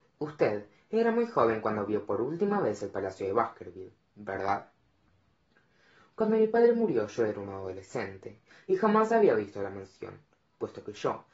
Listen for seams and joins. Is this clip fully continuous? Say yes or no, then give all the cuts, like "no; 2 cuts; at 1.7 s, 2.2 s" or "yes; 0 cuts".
yes; 0 cuts